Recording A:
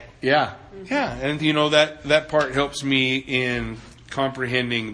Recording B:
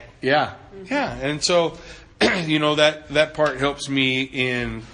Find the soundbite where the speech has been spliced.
A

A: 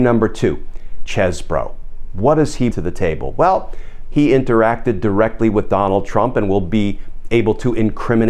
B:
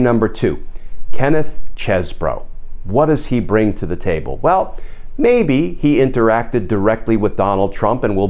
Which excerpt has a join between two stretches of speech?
A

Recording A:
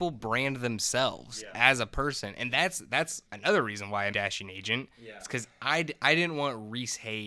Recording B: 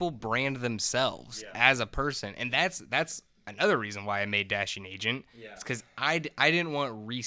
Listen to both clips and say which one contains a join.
A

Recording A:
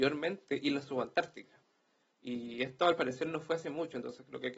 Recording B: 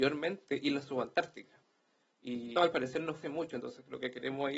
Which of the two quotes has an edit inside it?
B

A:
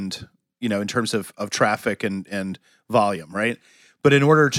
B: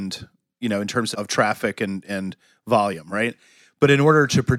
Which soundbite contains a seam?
B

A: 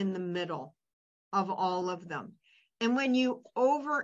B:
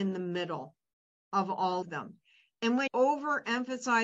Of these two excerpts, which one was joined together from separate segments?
B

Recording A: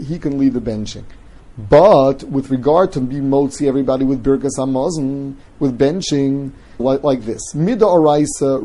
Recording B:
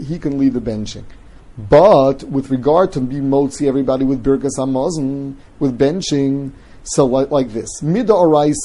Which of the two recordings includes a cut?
A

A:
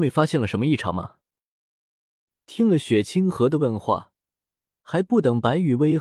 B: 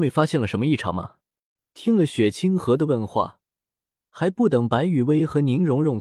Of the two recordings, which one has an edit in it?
B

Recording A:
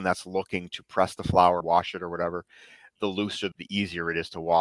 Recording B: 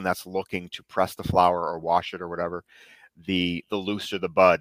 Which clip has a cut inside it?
A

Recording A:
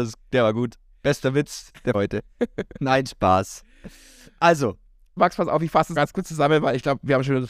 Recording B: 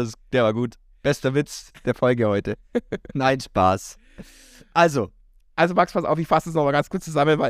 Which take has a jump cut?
A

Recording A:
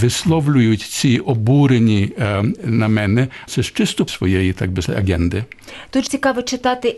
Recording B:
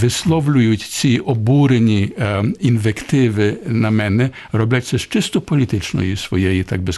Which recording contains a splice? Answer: A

